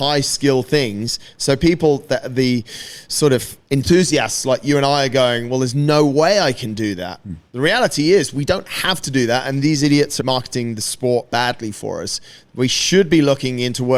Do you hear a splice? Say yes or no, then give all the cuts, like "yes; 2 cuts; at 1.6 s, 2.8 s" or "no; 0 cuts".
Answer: yes; 2 cuts; at 10.2 s, 11.3 s